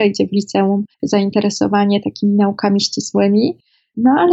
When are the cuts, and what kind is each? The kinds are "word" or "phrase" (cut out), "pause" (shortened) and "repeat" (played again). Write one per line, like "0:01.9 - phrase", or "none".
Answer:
0:00.9 - pause